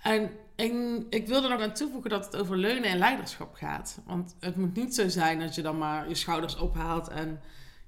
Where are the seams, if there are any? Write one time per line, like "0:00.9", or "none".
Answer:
0:01.6